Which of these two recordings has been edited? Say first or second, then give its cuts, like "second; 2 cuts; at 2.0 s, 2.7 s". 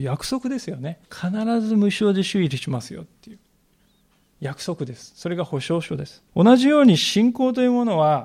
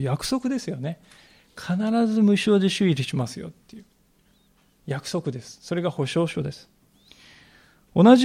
first; 2 cuts; at 1.1 s, 6.3 s